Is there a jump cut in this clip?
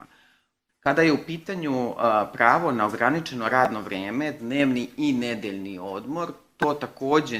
no; 0 cuts

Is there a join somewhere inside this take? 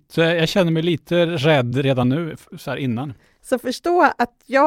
no; 0 cuts

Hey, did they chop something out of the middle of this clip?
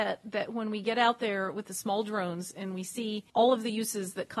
yes; 1 cut; at 3.3 s

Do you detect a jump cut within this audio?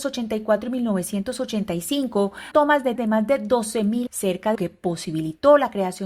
yes; 4 cuts; at 2.5 s, 3.0 s, 4.1 s, 4.6 s

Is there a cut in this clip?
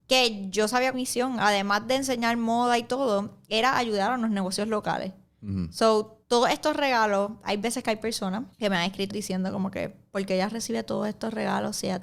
yes; 4 cuts; at 0.9 s, 6.2 s, 8.5 s, 9.1 s

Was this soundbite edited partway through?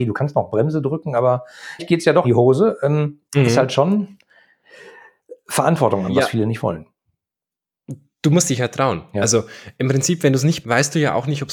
yes; 5 cuts; at 1.8 s, 2.2 s, 3.3 s, 6.1 s, 10.6 s

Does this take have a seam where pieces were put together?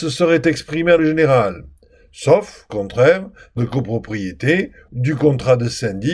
yes; 4 cuts; at 1.0 s, 2.7 s, 3.6 s, 4.9 s

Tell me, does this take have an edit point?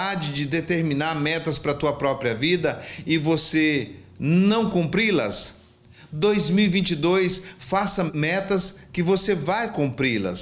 no; 0 cuts

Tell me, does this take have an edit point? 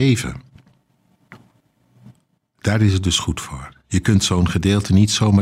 no; 0 cuts

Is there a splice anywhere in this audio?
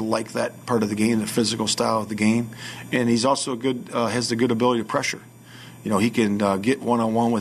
no; 0 cuts

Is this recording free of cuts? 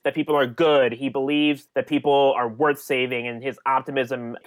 yes; 0 cuts

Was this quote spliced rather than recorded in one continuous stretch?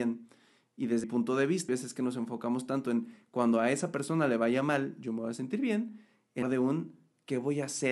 yes; 3 cuts; at 1.0 s, 1.7 s, 6.4 s

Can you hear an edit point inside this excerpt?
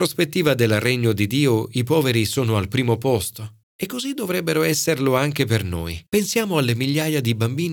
yes; 2 cuts; at 3.6 s, 6.1 s

